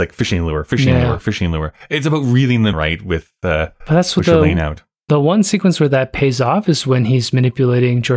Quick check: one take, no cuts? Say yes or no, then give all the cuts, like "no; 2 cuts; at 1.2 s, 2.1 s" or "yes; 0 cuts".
no; 1 cut; at 2.7 s